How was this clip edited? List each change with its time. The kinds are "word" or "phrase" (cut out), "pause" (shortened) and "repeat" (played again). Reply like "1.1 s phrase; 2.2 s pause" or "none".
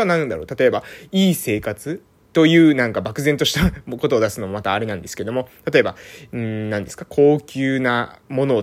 none